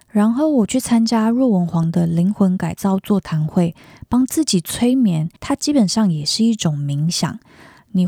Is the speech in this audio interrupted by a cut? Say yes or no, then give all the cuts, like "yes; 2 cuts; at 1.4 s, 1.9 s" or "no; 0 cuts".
yes; 1 cut; at 5.4 s